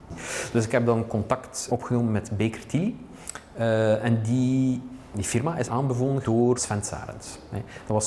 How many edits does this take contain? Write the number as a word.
four